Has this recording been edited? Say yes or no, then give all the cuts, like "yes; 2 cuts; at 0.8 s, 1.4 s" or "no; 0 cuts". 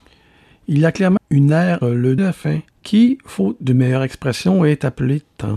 yes; 4 cuts; at 1.2 s, 1.8 s, 2.2 s, 2.7 s